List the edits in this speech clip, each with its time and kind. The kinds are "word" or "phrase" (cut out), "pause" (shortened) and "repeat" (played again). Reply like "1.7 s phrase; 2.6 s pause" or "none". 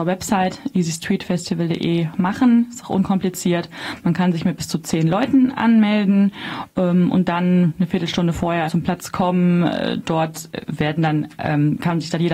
8.7 s word

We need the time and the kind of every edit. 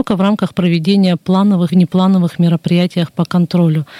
1.7 s word

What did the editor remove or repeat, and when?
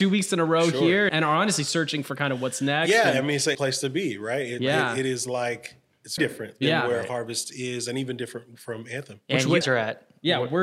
1.1 s word; 3.5 s word; 6.2 s word; 9.6 s word

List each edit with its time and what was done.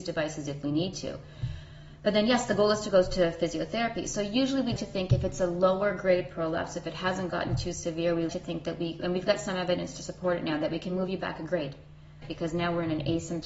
4.8 s word; 8.3 s word; 12.2 s phrase

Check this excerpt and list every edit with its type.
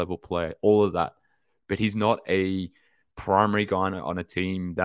none

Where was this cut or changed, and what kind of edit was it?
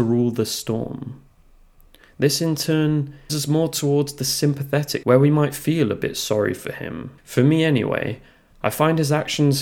3.3 s word; 5.0 s word; 7.2 s pause

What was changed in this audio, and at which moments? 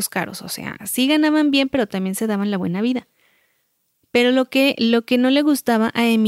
none

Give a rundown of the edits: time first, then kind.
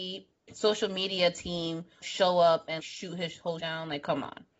2.0 s word; 2.8 s word; 3.6 s word

